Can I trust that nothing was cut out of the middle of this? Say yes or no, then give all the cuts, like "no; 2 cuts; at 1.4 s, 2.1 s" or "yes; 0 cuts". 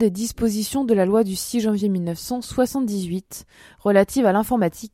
yes; 0 cuts